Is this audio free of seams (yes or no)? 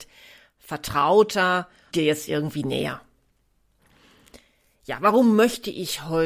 no